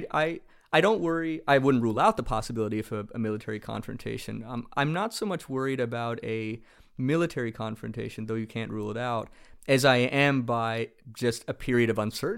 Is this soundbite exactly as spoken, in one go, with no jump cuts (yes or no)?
yes